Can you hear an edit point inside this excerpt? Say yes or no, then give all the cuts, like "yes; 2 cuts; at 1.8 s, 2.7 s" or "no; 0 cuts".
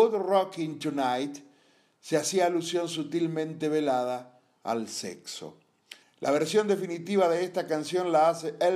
yes; 1 cut; at 6.0 s